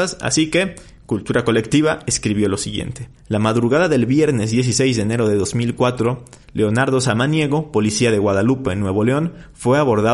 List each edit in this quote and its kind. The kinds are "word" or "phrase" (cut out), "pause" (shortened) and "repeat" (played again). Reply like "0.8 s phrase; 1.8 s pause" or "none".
3.2 s pause; 6.4 s pause

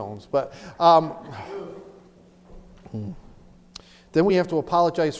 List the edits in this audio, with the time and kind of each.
none

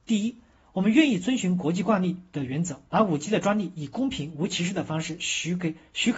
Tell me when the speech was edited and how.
2.9 s pause

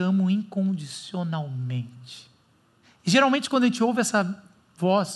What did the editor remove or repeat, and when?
2.8 s pause

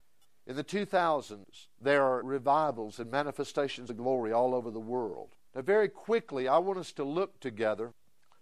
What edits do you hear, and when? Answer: 3.9 s word; 5.4 s pause

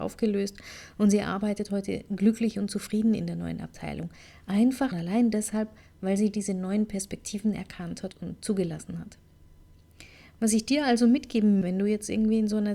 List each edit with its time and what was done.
4.9 s word; 8.1 s word; 11.6 s word

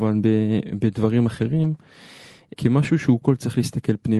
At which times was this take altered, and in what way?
2.5 s word; 3.2 s word

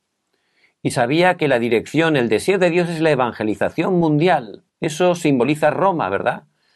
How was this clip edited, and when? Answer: 4.7 s pause

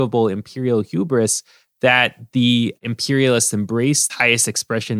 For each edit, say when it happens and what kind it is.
4.1 s word

